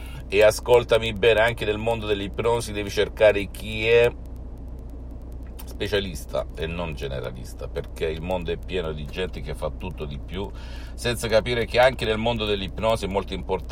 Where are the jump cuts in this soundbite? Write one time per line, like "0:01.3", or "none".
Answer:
none